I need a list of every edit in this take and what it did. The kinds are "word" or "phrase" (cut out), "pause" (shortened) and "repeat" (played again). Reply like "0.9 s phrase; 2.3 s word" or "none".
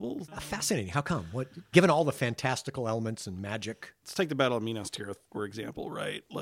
1.7 s word